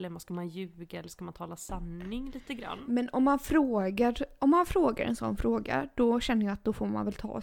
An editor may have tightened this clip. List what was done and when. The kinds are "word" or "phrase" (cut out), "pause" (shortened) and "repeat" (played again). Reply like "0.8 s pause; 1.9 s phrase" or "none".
none